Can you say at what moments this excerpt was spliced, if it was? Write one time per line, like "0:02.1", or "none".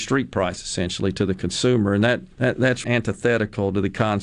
0:02.3
0:02.8